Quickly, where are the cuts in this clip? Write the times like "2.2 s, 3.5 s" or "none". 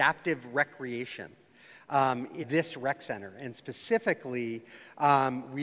2.4 s